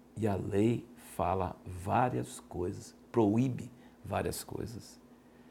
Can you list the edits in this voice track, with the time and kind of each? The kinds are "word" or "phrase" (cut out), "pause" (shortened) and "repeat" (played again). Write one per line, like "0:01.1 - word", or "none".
none